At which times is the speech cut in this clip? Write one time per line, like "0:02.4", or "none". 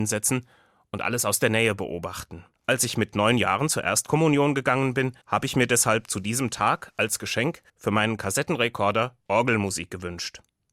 0:02.5
0:05.2
0:07.7
0:09.2